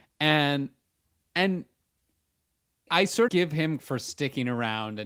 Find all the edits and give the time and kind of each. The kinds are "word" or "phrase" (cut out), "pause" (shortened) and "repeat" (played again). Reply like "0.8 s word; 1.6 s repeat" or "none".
2.9 s word; 3.3 s word; 3.8 s word

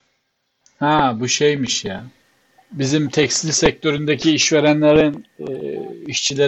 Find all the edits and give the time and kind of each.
none

